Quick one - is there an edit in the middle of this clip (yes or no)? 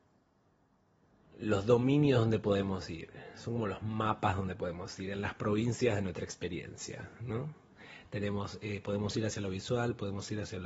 no